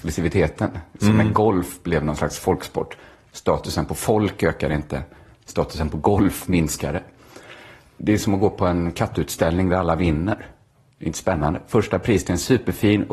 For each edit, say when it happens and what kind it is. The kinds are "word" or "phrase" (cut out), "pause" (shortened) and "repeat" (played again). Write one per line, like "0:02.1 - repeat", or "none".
none

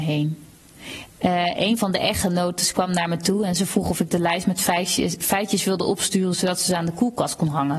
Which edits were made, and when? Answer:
none

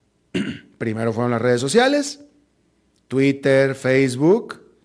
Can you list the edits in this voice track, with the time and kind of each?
none

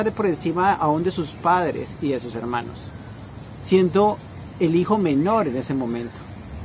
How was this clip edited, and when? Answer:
none

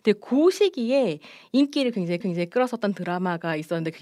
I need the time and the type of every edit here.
0:02.2 - repeat

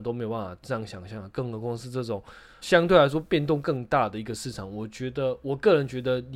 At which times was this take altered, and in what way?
0:02.6 - word

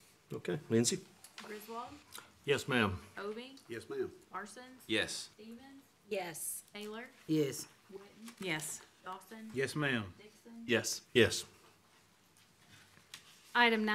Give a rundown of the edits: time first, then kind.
0:05.3 - pause
0:11.0 - pause

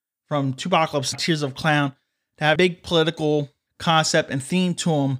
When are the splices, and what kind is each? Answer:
0:01.1 - word
0:02.6 - word

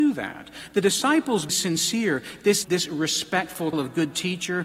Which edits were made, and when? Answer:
0:01.5 - phrase
0:02.6 - word
0:03.7 - word

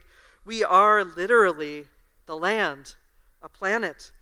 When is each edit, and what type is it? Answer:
none

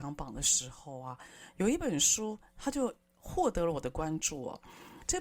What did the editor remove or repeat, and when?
none

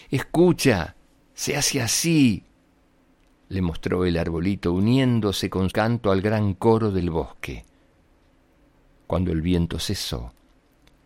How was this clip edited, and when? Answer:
0:05.7 - word

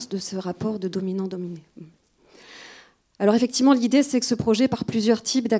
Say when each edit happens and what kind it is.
none

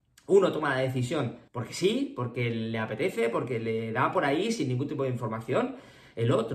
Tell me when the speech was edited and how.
0:01.5 - pause

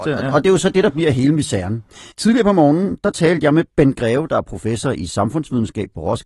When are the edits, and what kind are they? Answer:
0:02.1 - pause

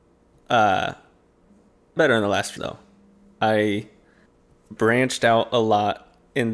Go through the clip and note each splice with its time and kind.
0:02.0 - word
0:02.6 - word
0:04.8 - word

